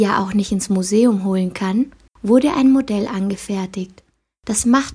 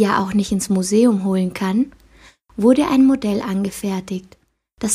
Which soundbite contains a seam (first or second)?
first